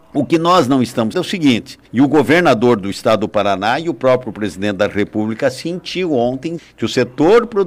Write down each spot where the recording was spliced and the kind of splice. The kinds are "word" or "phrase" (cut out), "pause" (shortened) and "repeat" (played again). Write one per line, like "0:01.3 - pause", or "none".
0:01.1 - word
0:01.8 - pause
0:06.6 - word